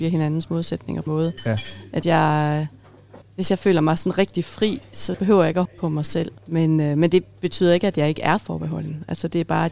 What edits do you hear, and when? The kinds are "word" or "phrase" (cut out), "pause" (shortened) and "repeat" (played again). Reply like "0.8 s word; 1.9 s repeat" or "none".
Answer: 1.1 s phrase; 2.0 s word; 3.2 s pause; 5.1 s word; 5.6 s phrase; 6.4 s pause